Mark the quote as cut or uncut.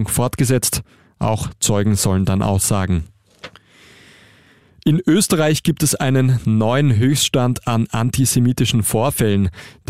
uncut